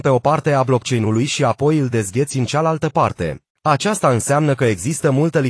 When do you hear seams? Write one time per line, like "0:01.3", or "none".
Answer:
0:03.5